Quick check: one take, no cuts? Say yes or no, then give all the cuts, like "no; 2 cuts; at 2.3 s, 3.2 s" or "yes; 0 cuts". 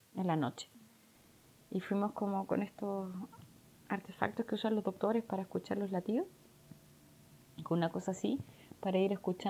yes; 0 cuts